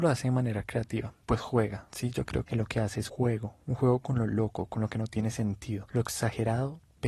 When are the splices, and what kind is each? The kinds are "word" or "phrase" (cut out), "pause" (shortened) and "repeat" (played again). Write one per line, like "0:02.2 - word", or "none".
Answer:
0:02.4 - word
0:03.1 - word